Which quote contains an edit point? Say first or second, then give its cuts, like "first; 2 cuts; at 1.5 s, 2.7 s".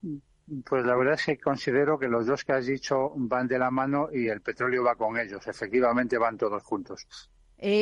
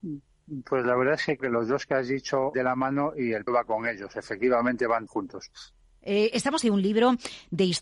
second; 5 cuts; at 1.4 s, 2.5 s, 3.5 s, 5.1 s, 6.6 s